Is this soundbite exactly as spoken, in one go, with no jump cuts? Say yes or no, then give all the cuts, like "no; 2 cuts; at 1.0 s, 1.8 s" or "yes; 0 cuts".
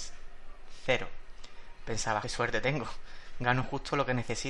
no; 1 cut; at 2.2 s